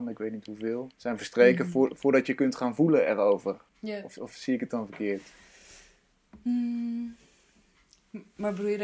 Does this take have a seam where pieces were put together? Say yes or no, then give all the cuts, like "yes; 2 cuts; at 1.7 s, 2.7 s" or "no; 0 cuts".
yes; 2 cuts; at 0.9 s, 3.7 s